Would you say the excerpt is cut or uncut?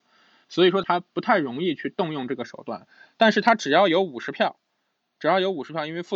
uncut